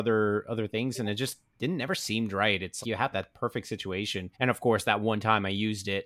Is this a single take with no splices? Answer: no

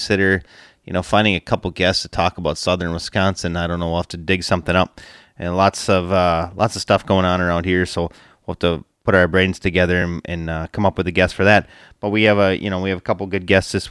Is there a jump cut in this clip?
no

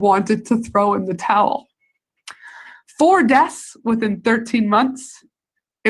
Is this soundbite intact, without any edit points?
yes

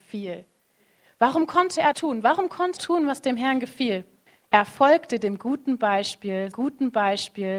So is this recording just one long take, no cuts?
no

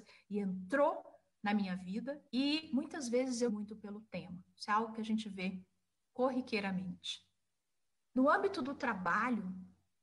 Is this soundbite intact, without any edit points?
no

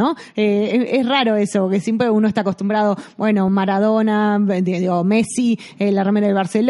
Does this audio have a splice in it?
no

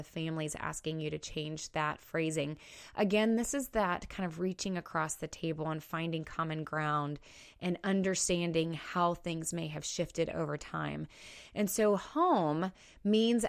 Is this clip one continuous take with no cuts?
yes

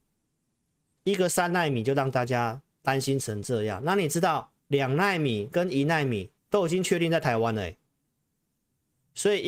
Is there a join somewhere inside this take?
yes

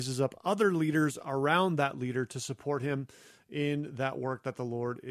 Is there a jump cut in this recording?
no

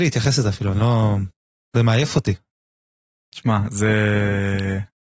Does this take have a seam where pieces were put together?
no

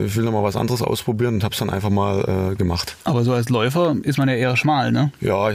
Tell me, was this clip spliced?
yes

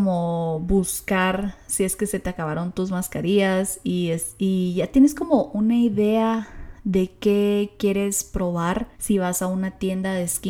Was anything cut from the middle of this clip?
yes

